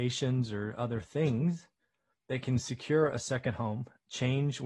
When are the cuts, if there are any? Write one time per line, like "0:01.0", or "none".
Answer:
none